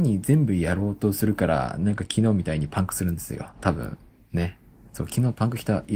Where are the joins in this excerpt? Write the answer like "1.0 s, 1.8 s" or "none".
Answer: none